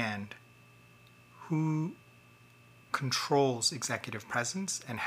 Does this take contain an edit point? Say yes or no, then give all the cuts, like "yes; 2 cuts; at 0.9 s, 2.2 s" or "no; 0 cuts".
no; 0 cuts